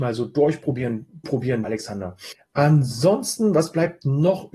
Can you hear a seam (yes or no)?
yes